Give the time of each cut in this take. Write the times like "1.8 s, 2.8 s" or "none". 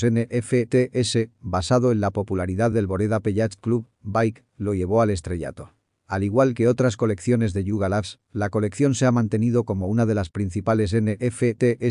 none